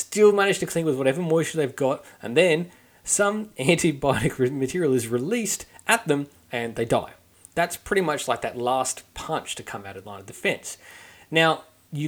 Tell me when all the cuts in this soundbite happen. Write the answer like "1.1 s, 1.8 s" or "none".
none